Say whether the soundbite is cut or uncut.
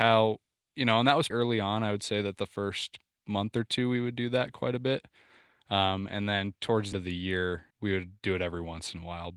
cut